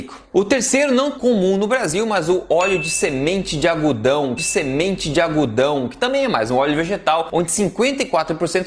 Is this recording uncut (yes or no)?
no